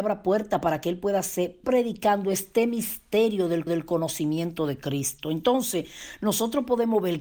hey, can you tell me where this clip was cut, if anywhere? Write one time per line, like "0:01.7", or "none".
0:01.6
0:03.7